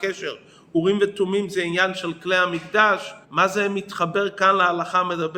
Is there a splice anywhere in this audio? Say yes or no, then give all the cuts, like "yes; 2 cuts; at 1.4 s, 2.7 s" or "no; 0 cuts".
yes; 1 cut; at 3.2 s